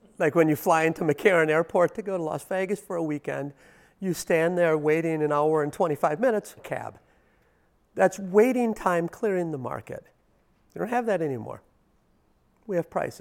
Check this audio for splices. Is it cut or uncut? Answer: cut